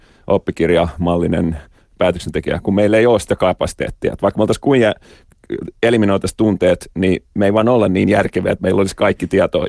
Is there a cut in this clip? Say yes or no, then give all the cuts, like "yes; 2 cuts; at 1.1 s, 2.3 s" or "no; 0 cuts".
no; 0 cuts